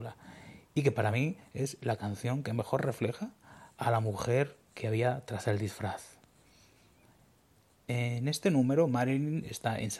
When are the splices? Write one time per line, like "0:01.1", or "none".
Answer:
none